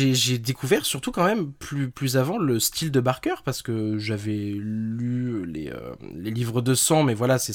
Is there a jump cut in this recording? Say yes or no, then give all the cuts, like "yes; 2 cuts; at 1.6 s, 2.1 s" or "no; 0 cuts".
no; 0 cuts